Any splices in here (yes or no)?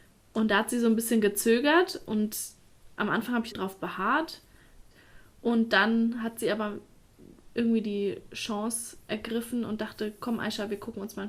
yes